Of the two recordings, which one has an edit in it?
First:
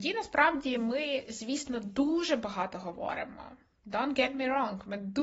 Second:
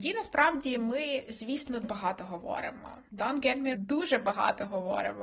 second; 3 cuts; at 1.8 s, 3.1 s, 3.7 s

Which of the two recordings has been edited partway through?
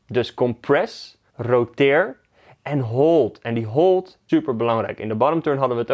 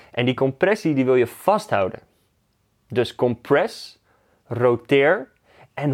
first; 2 cuts; at 1.3 s, 4.3 s

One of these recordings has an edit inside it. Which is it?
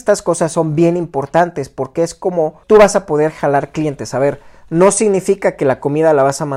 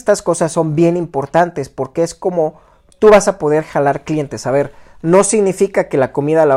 first; 1 cut; at 2.6 s

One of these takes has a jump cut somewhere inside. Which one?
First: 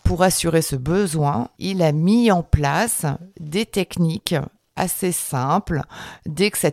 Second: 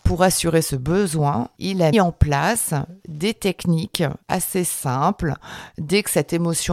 second; 2 cuts; at 1.9 s, 4.2 s

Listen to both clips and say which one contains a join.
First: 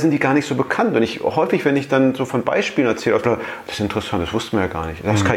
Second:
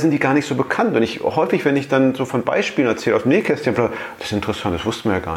first; 1 cut; at 3.2 s

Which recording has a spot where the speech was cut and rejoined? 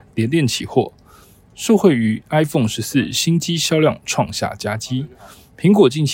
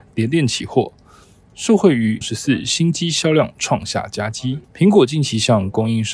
second; 2 cuts; at 2.2 s, 4.6 s

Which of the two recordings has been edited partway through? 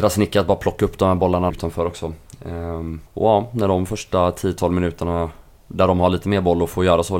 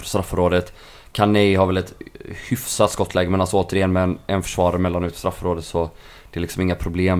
first; 2 cuts; at 1.5 s, 3.1 s

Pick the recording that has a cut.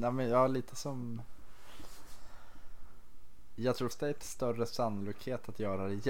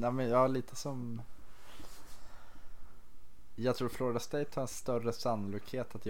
first; 2 cuts; at 3.9 s, 4.2 s

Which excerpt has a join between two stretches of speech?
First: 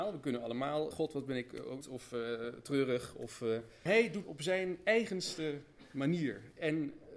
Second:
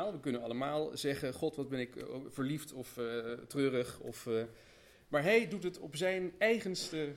first; 4 cuts; at 0.9 s, 1.8 s, 3.9 s, 4.2 s

